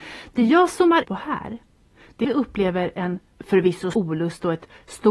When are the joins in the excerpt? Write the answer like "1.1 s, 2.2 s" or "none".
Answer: 1.0 s, 2.2 s, 3.9 s